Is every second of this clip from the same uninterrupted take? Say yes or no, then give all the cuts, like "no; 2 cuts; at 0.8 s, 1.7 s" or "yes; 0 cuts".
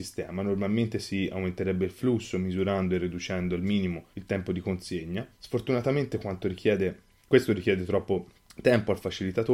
no; 3 cuts; at 4.1 s, 5.3 s, 8.4 s